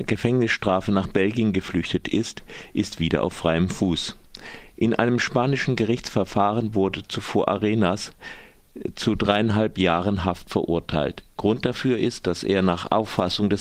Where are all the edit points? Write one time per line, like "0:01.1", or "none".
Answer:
none